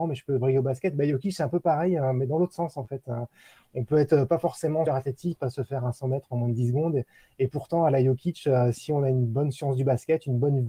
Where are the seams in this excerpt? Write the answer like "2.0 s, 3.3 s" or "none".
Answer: 4.9 s, 5.4 s